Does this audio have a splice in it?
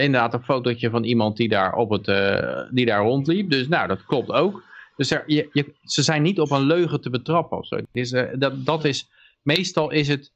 no; 0 cuts

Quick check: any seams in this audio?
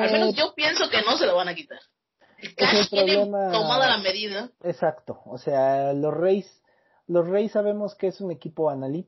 yes; 1 cut; at 4.5 s

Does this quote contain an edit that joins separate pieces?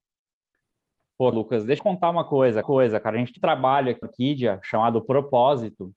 yes; 5 cuts; at 1.3 s, 1.8 s, 2.6 s, 3.4 s, 4.0 s

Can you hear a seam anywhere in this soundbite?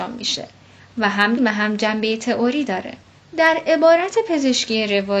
yes; 2 cuts; at 1.4 s, 3.1 s

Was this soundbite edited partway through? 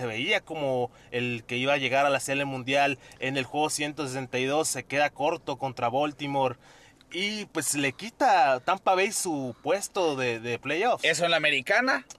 no; 0 cuts

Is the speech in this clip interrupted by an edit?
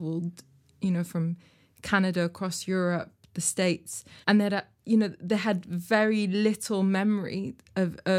yes; 1 cut; at 4.2 s

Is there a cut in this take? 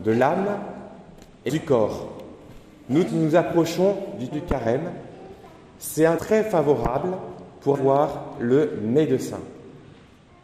yes; 5 cuts; at 1.5 s, 3.1 s, 4.3 s, 6.2 s, 7.7 s

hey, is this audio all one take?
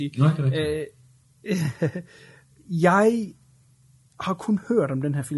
yes; 0 cuts

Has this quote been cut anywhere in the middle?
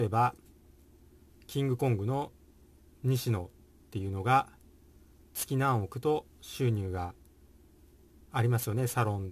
no; 0 cuts

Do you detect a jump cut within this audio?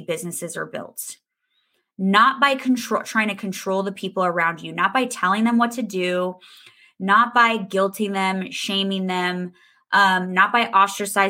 no; 0 cuts

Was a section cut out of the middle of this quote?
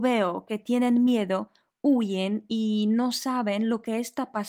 no; 0 cuts

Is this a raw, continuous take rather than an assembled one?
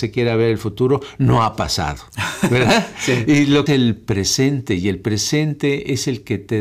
no; 1 cut; at 3.7 s

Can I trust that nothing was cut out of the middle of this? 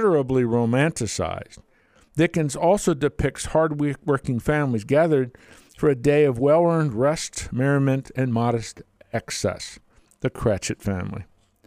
yes; 0 cuts

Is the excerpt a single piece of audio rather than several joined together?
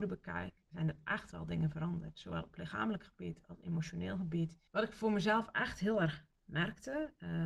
no; 1 cut; at 4.7 s

